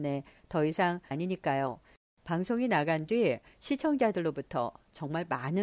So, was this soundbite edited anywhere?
yes; 1 cut; at 1.1 s

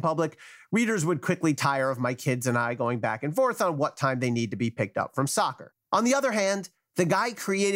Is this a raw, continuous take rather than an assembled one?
no; 1 cut; at 5.8 s

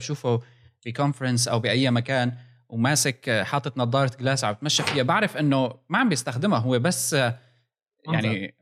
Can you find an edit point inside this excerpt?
no; 0 cuts

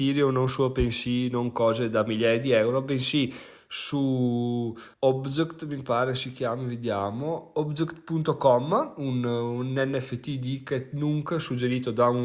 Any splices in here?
yes; 1 cut; at 4.9 s

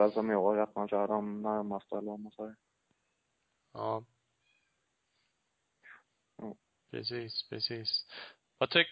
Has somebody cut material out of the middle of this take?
no; 0 cuts

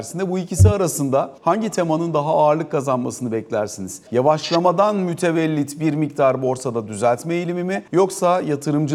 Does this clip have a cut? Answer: yes; 3 cuts; at 1.4 s, 4.1 s, 7.9 s

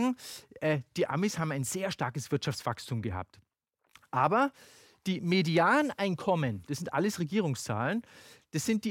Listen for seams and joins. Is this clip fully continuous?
yes; 0 cuts

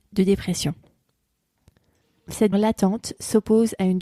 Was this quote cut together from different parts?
yes; 1 cut; at 2.5 s

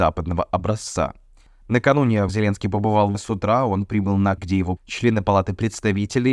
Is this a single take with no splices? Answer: no; 4 cuts; at 2.3 s, 3.1 s, 4.4 s, 4.8 s

